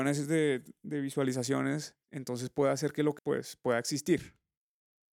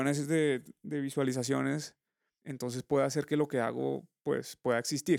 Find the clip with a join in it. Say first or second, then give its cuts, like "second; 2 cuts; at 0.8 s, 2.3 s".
first; 2 cuts; at 2.0 s, 3.2 s